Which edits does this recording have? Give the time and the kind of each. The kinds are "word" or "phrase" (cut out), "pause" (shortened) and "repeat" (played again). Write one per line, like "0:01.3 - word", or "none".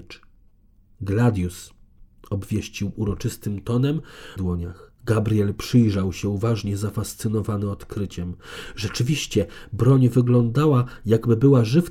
0:04.4 - phrase
0:05.0 - pause